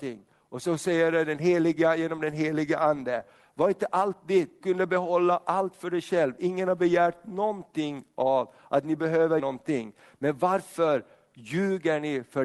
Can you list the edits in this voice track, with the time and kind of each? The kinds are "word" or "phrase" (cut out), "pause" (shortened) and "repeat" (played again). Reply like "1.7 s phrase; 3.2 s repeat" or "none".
4.6 s word; 9.4 s word